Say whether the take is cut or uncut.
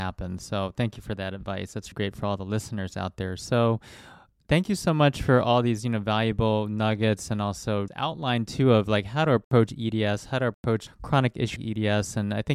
cut